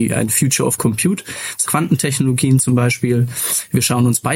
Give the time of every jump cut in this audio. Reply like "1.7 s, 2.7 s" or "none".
1.7 s